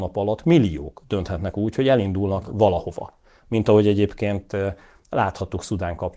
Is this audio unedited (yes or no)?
yes